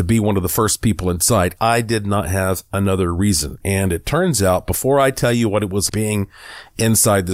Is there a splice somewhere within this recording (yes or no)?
yes